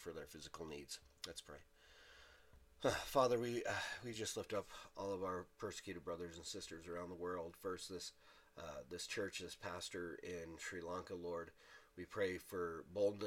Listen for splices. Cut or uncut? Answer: uncut